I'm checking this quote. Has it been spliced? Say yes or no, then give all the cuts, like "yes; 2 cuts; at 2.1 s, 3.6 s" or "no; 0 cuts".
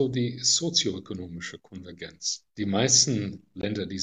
yes; 1 cut; at 2.5 s